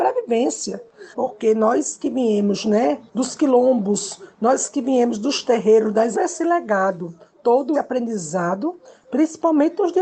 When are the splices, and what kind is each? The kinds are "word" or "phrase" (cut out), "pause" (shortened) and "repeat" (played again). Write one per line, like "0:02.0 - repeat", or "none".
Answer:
0:01.1 - pause
0:03.1 - pause
0:06.1 - phrase
0:07.7 - word